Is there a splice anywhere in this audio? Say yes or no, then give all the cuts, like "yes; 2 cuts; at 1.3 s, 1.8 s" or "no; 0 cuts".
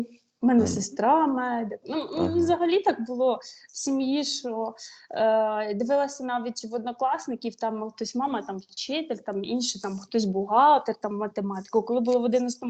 no; 0 cuts